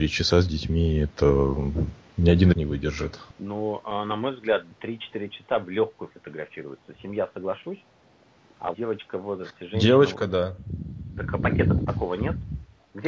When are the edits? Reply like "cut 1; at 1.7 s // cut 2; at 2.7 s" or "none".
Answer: cut 1; at 2.5 s // cut 2; at 4.7 s // cut 3; at 8.7 s